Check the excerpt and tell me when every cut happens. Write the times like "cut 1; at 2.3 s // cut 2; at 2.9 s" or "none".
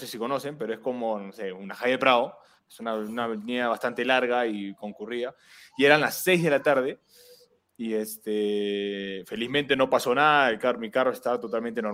none